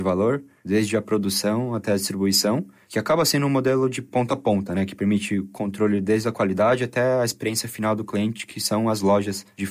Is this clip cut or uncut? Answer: uncut